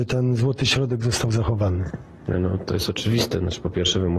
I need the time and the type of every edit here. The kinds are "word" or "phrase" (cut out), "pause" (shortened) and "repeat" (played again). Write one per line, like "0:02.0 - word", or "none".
0:02.6 - word